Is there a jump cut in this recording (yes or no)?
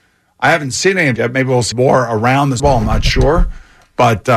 yes